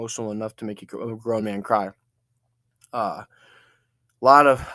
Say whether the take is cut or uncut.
uncut